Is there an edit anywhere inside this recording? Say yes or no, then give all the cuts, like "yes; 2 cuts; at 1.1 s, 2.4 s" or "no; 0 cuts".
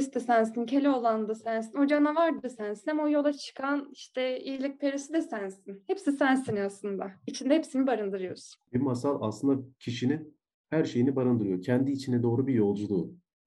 no; 0 cuts